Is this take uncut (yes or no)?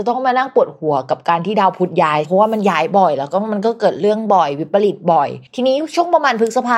no